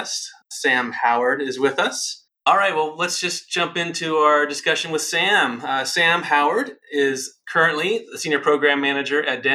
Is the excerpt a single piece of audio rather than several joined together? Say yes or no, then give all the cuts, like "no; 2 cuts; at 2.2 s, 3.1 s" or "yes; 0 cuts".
yes; 0 cuts